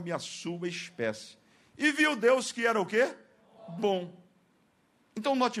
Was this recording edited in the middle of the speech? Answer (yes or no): no